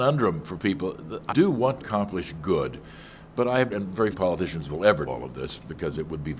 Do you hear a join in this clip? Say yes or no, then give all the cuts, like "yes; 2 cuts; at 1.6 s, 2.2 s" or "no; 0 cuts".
yes; 5 cuts; at 1.3 s, 1.8 s, 3.7 s, 4.1 s, 5.1 s